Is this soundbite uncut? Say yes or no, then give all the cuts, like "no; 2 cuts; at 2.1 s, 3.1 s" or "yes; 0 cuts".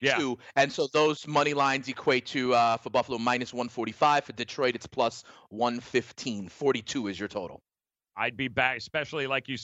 yes; 0 cuts